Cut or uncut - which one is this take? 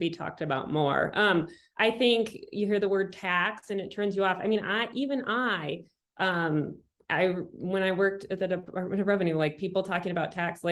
uncut